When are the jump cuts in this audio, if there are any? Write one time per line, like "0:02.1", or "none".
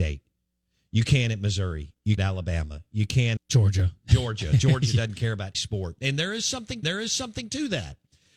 0:02.2
0:03.4
0:05.5
0:06.8